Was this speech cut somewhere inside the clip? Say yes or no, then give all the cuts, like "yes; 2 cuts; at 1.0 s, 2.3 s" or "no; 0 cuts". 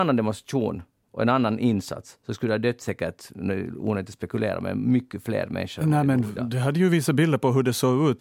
no; 0 cuts